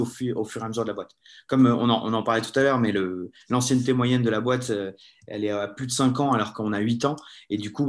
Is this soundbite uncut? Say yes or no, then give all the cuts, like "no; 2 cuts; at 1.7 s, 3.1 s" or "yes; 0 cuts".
yes; 0 cuts